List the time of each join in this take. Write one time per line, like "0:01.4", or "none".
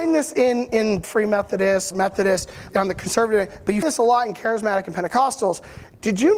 0:01.0
0:01.9
0:02.7
0:03.8

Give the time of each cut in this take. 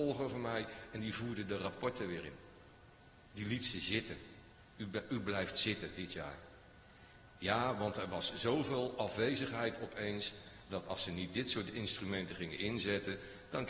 none

